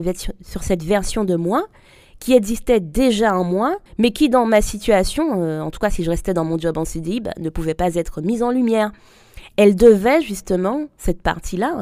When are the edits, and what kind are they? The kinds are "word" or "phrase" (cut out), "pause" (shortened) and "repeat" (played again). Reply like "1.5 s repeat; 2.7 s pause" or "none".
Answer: 3.9 s pause